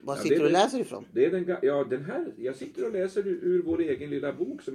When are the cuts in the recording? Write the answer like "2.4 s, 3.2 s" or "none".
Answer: none